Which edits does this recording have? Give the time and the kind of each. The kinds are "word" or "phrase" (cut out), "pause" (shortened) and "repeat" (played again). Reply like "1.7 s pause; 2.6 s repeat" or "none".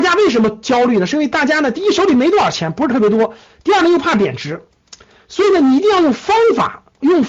none